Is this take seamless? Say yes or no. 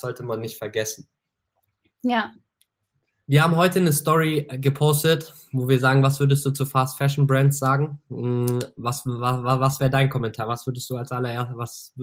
yes